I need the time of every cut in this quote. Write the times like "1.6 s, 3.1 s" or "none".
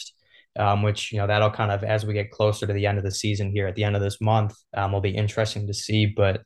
4.6 s